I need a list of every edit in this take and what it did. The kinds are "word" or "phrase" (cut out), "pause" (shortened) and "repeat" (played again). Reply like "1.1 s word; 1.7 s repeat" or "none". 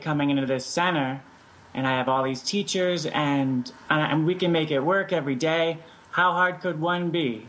none